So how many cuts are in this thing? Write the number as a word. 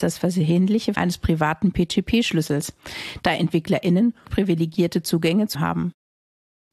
three